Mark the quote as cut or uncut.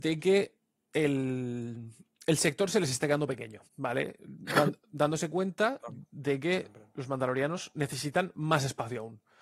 cut